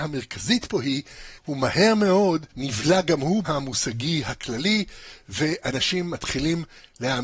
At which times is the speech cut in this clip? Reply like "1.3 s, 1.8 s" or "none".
1.4 s, 2.5 s, 3.4 s